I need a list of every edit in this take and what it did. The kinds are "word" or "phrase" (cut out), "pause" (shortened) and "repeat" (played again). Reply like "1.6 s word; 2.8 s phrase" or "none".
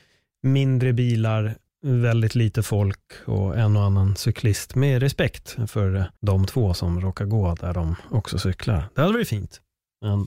1.7 s pause; 6.2 s pause